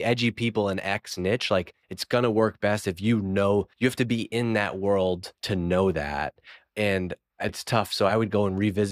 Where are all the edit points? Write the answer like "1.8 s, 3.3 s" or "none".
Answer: 1.8 s, 3.7 s, 5.3 s, 7.5 s